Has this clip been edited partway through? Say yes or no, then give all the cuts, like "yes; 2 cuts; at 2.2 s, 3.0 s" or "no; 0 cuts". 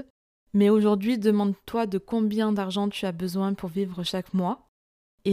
no; 0 cuts